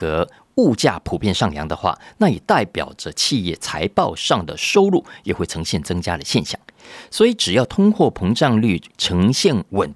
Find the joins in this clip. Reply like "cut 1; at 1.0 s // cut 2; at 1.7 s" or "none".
none